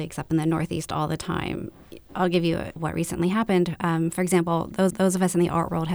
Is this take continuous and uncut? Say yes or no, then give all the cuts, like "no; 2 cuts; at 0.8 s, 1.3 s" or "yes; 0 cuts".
no; 2 cuts; at 2.8 s, 4.9 s